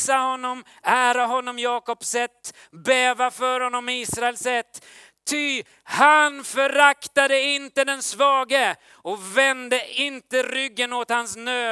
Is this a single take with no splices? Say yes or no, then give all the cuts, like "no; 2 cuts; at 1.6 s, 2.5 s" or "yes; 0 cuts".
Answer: yes; 0 cuts